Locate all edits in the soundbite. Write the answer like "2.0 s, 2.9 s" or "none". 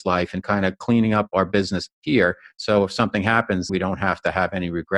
3.7 s